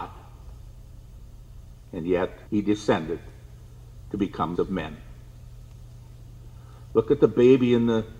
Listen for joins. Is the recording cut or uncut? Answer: cut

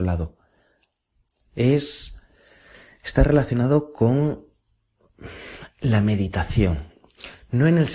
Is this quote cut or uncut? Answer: uncut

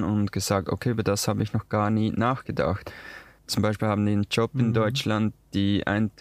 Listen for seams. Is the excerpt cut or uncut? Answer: cut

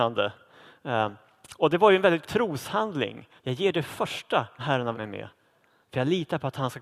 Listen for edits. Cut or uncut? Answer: cut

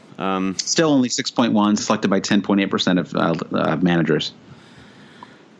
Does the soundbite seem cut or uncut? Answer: cut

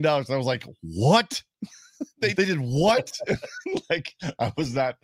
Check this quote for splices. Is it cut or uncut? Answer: cut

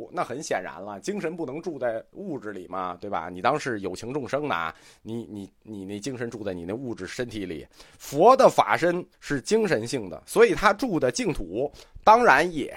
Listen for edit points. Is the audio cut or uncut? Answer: cut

